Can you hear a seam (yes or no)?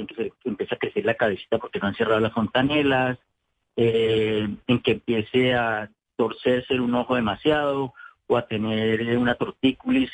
no